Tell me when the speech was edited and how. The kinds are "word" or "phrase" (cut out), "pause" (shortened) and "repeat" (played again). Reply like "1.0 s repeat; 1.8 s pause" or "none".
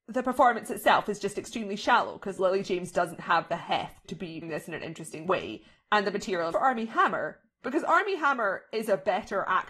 4.0 s word; 4.4 s word; 6.5 s phrase; 7.5 s phrase